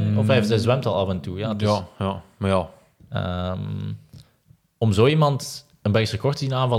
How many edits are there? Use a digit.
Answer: 0